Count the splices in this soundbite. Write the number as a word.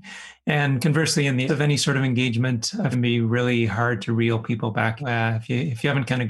three